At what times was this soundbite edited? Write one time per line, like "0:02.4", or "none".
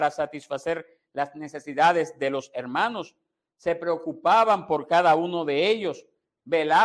none